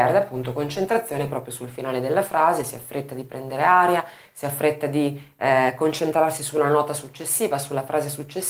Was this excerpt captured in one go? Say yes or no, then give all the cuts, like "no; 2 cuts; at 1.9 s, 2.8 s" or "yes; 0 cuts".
yes; 0 cuts